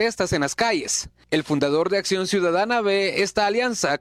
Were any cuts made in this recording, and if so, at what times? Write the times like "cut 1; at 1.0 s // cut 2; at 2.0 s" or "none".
none